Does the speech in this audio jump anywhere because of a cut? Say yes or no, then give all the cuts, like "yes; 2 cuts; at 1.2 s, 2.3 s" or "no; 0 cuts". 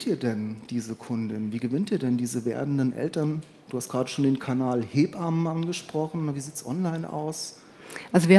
no; 0 cuts